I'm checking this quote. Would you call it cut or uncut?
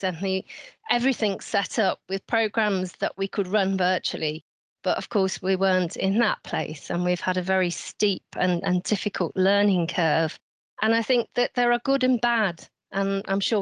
uncut